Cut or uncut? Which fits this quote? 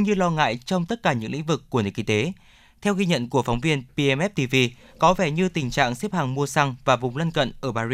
uncut